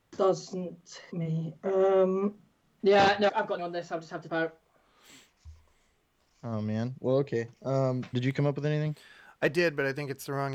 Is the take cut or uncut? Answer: cut